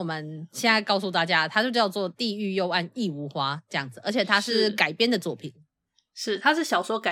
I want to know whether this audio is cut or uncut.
uncut